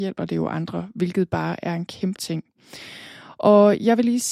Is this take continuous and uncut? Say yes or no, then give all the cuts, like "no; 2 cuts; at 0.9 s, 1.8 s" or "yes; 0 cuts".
no; 1 cut; at 2.2 s